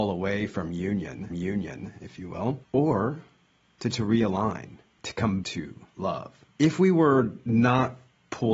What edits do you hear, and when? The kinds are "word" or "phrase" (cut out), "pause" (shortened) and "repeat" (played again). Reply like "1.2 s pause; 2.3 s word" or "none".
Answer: 1.3 s repeat; 2.6 s pause; 3.9 s word; 4.9 s pause; 5.4 s word; 6.5 s pause

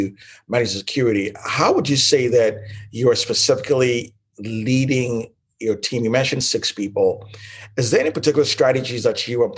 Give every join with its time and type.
none

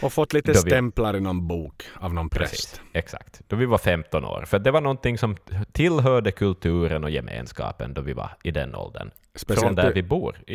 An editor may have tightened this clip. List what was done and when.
2.9 s pause

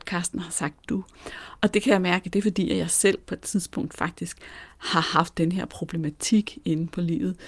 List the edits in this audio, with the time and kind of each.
none

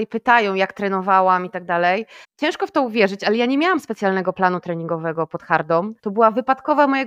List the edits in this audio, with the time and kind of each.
2.2 s pause; 6.0 s pause

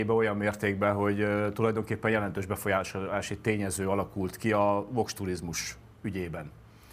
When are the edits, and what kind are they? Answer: none

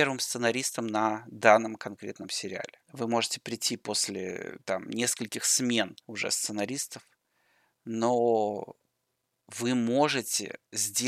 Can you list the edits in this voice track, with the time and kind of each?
2.8 s pause; 6.0 s pause

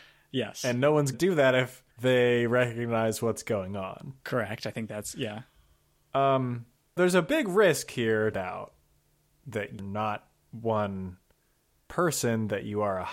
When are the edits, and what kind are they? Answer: 1.1 s word; 1.9 s pause; 4.2 s pause; 7.0 s word; 8.3 s phrase; 9.8 s word

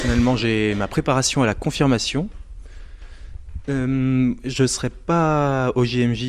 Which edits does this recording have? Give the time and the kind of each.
none

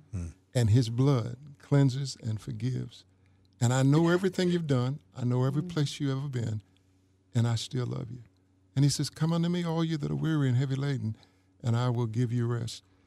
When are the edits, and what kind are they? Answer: none

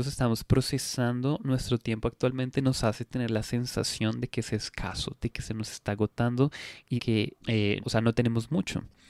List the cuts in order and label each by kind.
7.0 s word; 7.4 s word; 7.8 s word

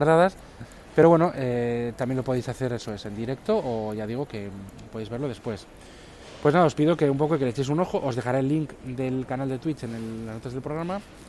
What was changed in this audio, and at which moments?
none

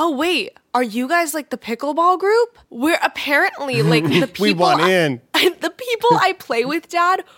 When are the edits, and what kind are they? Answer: 2.6 s pause

